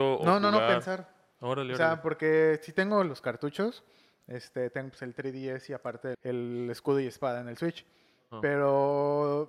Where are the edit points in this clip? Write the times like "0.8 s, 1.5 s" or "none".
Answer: 6.1 s